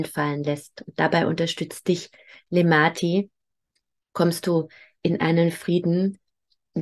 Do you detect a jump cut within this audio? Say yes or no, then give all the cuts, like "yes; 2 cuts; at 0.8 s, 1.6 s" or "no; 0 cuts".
no; 0 cuts